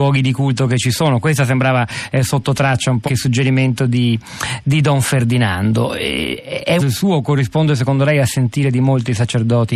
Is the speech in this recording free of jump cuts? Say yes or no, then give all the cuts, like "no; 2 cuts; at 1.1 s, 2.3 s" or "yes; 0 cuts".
no; 2 cuts; at 3.1 s, 6.8 s